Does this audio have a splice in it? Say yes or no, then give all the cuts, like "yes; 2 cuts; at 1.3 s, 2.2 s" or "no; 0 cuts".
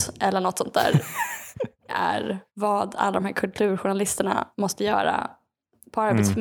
yes; 3 cuts; at 1.9 s, 2.5 s, 4.5 s